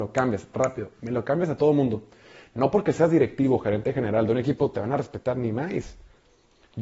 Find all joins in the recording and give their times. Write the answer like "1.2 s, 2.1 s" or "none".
none